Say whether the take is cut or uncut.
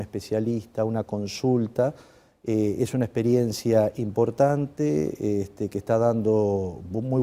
uncut